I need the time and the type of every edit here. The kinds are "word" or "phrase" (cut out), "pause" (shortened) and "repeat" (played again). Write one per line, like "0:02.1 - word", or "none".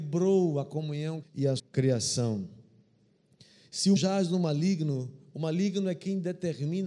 0:01.2 - phrase
0:01.6 - word
0:04.0 - word